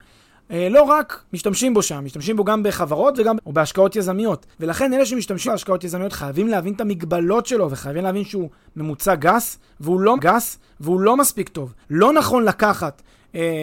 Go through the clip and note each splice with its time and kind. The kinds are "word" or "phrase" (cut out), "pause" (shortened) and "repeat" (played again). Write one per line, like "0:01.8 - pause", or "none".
0:01.3 - pause
0:03.4 - phrase
0:04.5 - pause
0:05.5 - word
0:10.2 - repeat
0:11.8 - pause